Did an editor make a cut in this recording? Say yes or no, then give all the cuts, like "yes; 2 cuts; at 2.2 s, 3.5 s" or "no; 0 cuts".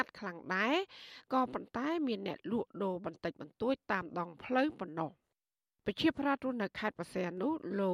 no; 0 cuts